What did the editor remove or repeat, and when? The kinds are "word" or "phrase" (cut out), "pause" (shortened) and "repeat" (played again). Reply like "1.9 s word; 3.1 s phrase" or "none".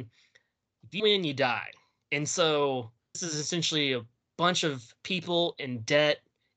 1.0 s word; 2.0 s word; 3.1 s word